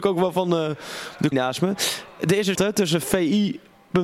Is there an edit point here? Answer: yes; 2 cuts; at 1.3 s, 2.5 s

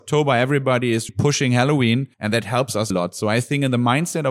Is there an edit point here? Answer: yes; 3 cuts; at 1.1 s, 2.1 s, 2.9 s

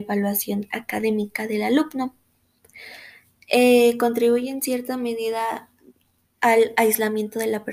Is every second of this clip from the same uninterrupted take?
yes; 0 cuts

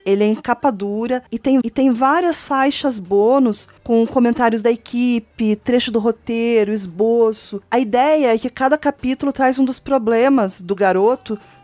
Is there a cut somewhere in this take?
yes; 1 cut; at 1.6 s

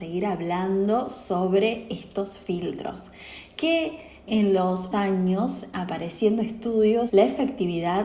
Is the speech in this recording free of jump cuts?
no; 4 cuts; at 4.3 s, 4.9 s, 5.7 s, 7.1 s

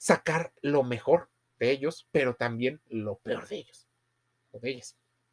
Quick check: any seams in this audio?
no; 0 cuts

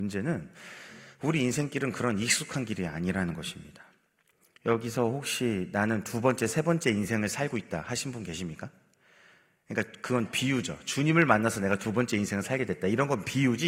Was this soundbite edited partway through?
no; 0 cuts

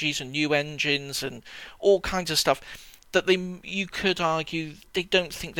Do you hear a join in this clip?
no; 0 cuts

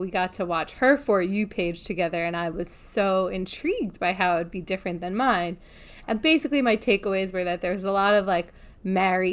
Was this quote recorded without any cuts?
yes; 0 cuts

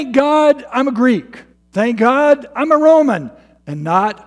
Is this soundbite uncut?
no; 1 cut; at 1.6 s

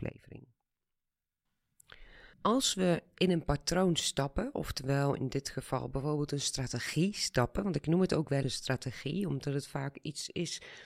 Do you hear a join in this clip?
yes; 2 cuts; at 2.3 s, 8.4 s

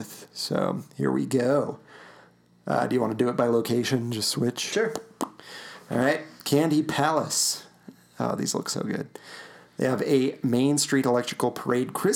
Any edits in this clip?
no; 0 cuts

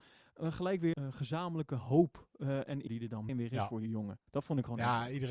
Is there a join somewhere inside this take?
yes; 3 cuts; at 0.9 s, 2.9 s, 3.3 s

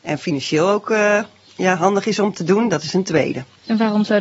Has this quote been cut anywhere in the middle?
no; 0 cuts

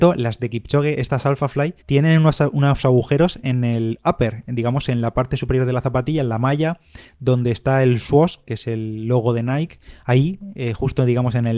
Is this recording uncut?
no; 1 cut; at 1.8 s

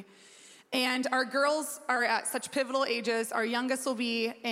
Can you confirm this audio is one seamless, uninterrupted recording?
yes; 0 cuts

